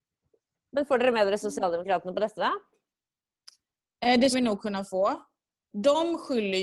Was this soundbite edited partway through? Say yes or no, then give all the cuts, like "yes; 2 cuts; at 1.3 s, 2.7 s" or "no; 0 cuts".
yes; 1 cut; at 4.3 s